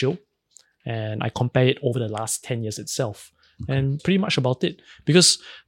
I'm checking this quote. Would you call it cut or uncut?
cut